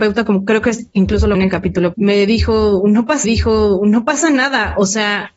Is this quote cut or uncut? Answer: cut